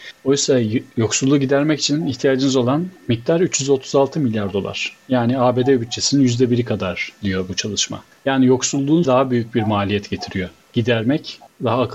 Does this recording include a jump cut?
yes; 2 cuts; at 3.0 s, 9.0 s

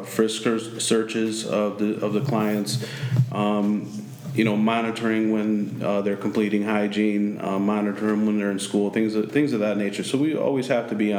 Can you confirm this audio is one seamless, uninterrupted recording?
yes; 0 cuts

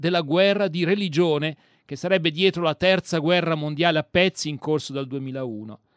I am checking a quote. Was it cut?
no; 0 cuts

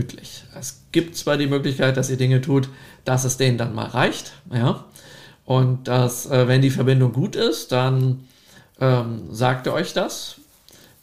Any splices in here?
no; 0 cuts

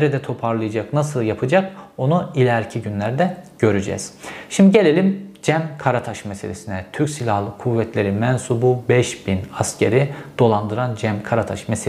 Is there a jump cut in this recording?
no; 0 cuts

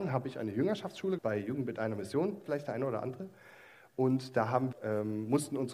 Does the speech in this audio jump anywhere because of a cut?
yes; 3 cuts; at 1.2 s, 2.5 s, 4.7 s

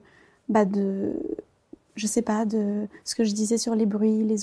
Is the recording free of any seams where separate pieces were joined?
yes; 0 cuts

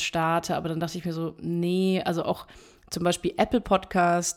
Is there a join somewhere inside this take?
no; 0 cuts

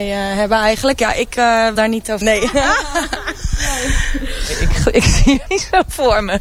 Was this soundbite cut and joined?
yes; 3 cuts; at 1.8 s, 2.2 s, 5.5 s

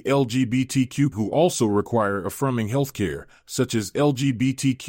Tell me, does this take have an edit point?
yes; 1 cut; at 1.1 s

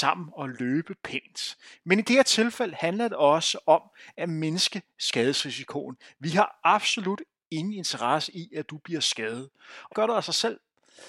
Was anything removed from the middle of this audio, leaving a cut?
yes; 1 cut; at 9.9 s

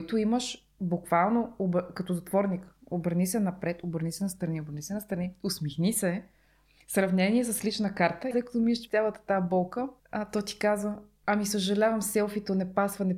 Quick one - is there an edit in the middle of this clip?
yes; 3 cuts; at 8.3 s, 8.9 s, 10.0 s

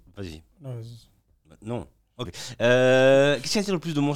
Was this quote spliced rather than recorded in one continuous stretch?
yes; 1 cut; at 2.3 s

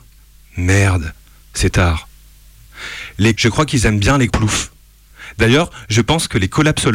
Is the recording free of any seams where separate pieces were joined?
no; 3 cuts; at 1.7 s, 3.3 s, 4.3 s

